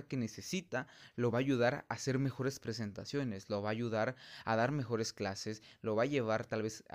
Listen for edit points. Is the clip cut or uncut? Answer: uncut